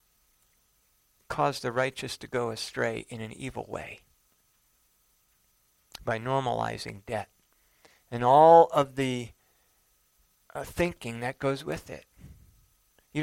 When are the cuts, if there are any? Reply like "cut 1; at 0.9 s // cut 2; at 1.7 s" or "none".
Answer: none